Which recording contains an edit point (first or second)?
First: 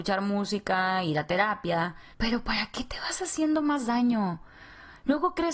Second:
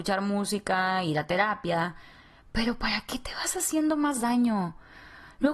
first